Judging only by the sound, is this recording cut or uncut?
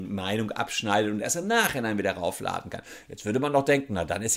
uncut